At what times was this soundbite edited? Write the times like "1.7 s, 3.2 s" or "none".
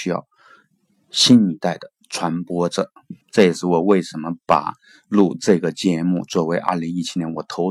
3.2 s